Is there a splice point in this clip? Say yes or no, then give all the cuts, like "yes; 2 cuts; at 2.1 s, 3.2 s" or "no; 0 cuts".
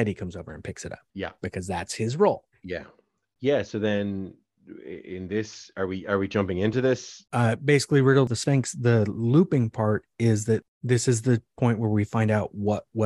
no; 0 cuts